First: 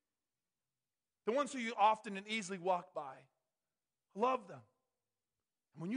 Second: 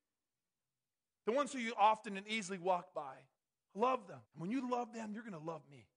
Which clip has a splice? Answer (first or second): second